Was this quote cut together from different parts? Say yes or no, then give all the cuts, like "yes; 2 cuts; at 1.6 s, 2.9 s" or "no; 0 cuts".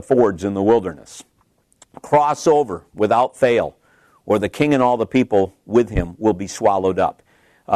no; 0 cuts